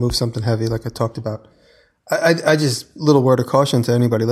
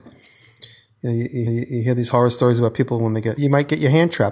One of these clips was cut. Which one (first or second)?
second